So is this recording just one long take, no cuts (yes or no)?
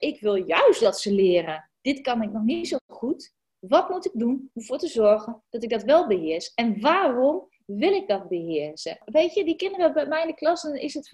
yes